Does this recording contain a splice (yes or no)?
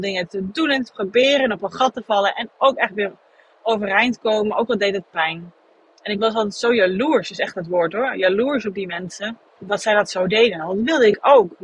yes